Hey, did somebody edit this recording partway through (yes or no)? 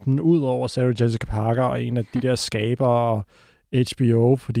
no